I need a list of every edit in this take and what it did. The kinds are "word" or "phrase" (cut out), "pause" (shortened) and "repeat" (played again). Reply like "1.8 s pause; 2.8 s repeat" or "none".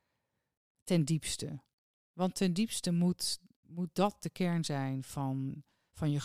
none